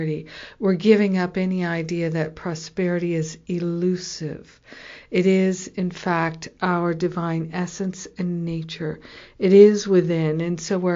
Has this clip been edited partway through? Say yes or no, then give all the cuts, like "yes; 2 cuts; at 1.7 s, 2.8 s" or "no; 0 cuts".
no; 0 cuts